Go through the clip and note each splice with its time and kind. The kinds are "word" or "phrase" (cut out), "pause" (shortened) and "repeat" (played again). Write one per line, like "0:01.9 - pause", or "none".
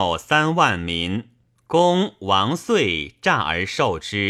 0:01.4 - pause